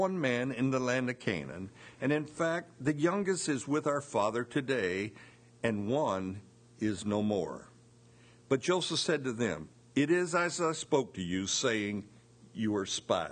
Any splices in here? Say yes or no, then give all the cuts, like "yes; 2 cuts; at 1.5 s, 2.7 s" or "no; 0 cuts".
no; 0 cuts